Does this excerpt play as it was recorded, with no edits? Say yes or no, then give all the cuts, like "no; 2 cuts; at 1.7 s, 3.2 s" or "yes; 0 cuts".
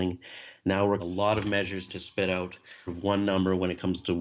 no; 3 cuts; at 1.0 s, 1.9 s, 2.9 s